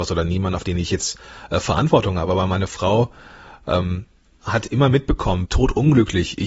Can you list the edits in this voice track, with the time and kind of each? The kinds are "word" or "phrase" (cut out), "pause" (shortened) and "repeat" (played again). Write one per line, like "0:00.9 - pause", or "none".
0:05.5 - word